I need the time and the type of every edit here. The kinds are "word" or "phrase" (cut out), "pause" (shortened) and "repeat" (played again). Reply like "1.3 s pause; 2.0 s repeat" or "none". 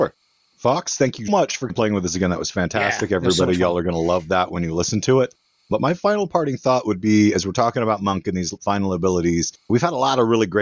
1.3 s word; 1.7 s word